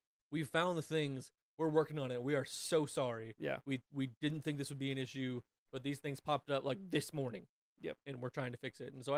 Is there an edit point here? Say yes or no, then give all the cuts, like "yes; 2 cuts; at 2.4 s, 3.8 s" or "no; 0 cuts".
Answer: no; 0 cuts